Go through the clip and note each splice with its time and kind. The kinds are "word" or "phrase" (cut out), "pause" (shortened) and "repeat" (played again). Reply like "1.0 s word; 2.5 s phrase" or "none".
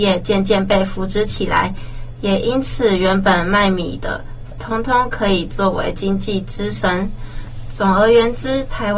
4.5 s phrase